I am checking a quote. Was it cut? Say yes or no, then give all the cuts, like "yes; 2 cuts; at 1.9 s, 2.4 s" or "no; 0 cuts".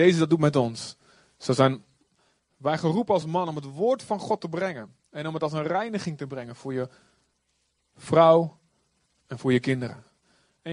no; 0 cuts